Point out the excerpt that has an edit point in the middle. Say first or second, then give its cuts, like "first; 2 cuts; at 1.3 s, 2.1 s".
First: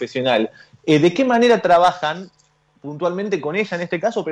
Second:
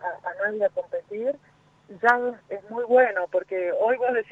second; 1 cut; at 2.4 s